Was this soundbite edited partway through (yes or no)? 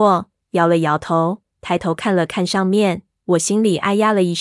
no